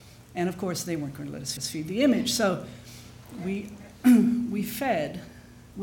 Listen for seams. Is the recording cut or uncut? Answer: cut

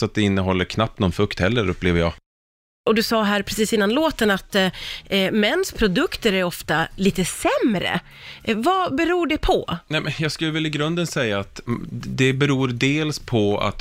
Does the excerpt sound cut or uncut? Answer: uncut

